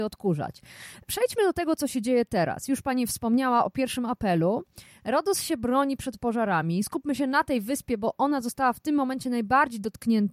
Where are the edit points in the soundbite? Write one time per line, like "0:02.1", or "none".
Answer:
none